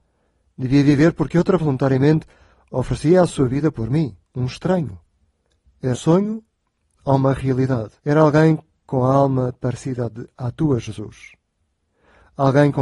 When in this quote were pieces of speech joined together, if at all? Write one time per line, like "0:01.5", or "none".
0:01.6
0:04.2
0:05.9
0:08.0